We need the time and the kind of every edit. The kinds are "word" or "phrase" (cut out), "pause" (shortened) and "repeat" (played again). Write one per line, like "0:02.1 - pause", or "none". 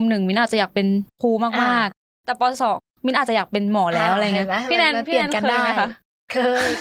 0:01.1 - pause